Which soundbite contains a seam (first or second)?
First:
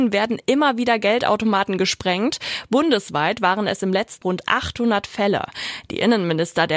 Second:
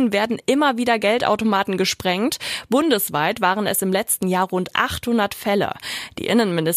first